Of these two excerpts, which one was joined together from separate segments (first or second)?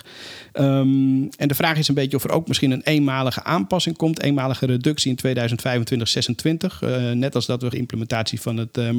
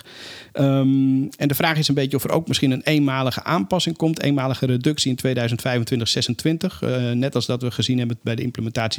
first